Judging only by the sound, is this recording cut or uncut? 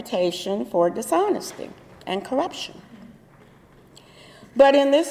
uncut